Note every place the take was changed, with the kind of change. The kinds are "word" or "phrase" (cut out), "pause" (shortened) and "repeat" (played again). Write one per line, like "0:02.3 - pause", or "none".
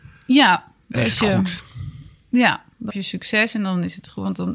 0:00.9 - word
0:02.9 - word